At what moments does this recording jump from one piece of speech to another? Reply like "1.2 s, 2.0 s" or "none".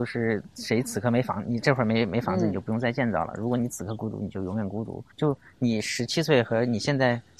5.1 s